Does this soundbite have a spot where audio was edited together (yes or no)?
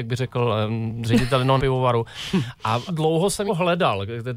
yes